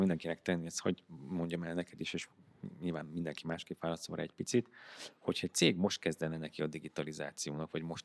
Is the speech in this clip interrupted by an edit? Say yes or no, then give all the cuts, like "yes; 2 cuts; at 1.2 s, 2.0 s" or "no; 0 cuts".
no; 0 cuts